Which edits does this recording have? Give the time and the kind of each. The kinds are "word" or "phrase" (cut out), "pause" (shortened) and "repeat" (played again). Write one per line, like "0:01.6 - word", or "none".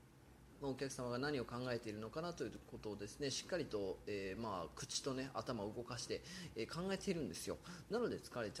none